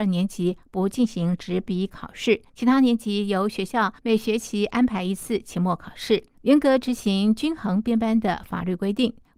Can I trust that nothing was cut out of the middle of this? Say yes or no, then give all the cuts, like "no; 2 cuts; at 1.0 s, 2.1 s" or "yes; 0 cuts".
no; 3 cuts; at 2.5 s, 4.0 s, 6.3 s